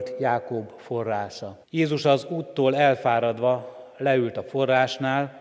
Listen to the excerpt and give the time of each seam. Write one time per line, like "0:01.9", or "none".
0:01.6